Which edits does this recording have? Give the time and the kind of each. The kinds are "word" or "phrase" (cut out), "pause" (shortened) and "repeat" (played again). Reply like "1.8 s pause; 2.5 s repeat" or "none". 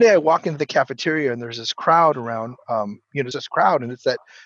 3.3 s word

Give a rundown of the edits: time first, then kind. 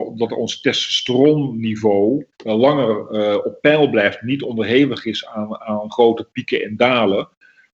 2.3 s pause

